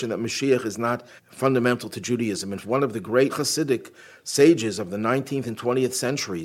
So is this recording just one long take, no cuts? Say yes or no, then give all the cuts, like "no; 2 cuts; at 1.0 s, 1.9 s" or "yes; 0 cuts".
no; 3 cuts; at 1.2 s, 2.6 s, 3.3 s